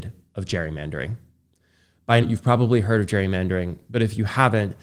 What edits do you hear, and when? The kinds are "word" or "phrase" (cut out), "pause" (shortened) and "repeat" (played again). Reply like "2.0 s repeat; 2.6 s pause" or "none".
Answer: 2.2 s word